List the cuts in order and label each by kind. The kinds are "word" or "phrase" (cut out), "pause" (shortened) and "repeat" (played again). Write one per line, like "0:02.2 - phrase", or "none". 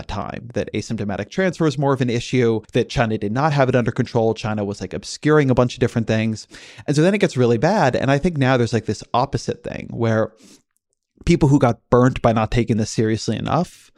0:02.6 - pause

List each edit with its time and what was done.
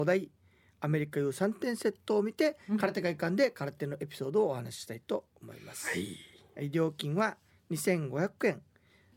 none

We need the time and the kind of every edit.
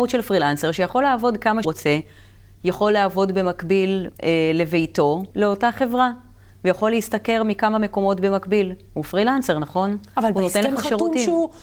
0:01.6 - phrase
0:04.1 - pause
0:05.3 - word

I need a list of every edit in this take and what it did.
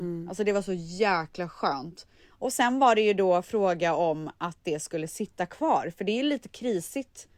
none

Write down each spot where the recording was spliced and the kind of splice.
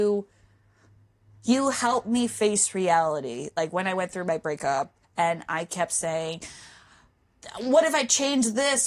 0:05.0 - pause

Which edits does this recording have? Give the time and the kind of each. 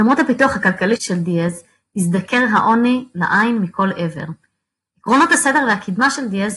0:01.0 - word

